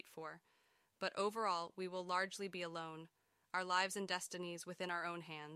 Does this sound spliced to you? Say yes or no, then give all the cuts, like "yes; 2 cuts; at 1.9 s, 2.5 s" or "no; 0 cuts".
no; 0 cuts